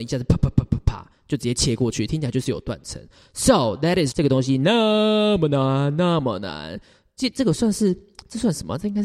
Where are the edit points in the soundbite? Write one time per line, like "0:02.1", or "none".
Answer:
0:04.1